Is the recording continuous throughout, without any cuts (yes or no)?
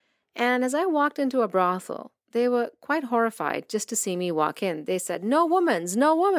yes